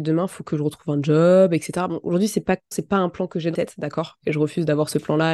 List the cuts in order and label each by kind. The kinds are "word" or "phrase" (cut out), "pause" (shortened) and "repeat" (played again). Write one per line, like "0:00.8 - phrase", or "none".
0:02.7 - word
0:03.5 - word